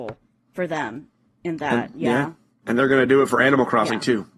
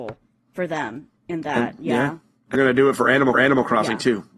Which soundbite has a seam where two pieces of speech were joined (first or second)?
second